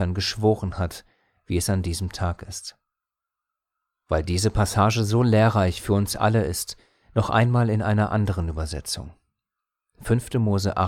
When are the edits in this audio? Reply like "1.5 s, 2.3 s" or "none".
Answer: none